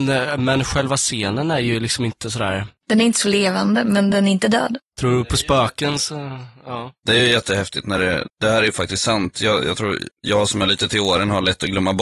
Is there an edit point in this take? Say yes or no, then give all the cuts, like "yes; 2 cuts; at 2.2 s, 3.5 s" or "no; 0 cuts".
no; 0 cuts